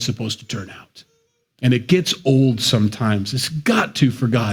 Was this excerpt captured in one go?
no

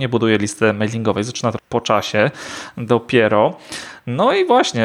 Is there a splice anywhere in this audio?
yes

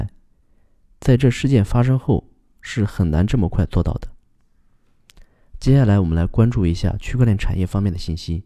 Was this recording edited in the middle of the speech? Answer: no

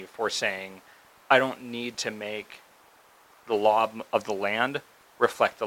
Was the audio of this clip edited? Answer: no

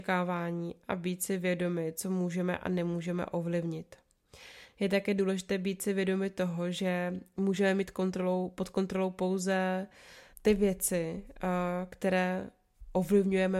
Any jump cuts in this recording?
yes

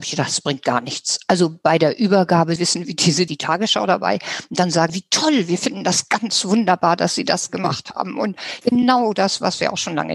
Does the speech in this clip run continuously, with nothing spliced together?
no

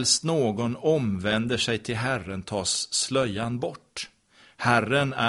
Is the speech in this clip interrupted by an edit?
no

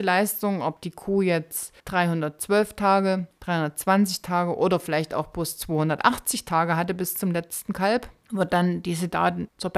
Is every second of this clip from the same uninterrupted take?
no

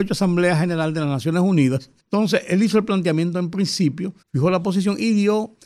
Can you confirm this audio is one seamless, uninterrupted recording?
no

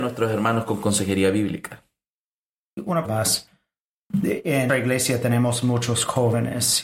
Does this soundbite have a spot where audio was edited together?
yes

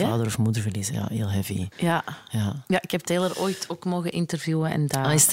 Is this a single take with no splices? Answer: no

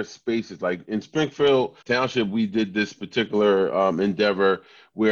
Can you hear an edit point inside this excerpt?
yes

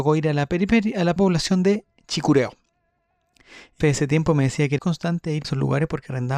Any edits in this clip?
yes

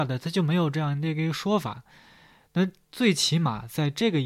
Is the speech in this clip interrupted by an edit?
no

